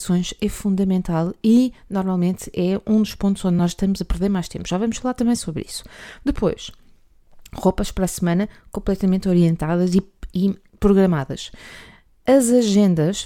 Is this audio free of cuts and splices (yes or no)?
yes